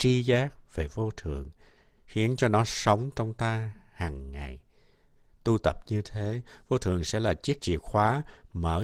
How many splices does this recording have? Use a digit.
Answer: 0